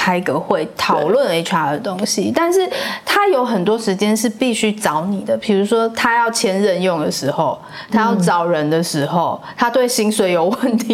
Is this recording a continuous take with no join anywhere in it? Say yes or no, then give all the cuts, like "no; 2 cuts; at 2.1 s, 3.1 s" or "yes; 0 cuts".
yes; 0 cuts